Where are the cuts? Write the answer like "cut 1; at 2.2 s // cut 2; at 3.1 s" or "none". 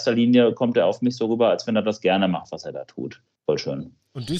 cut 1; at 3.3 s